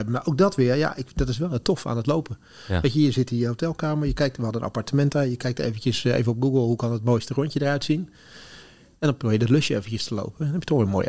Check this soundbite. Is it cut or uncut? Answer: uncut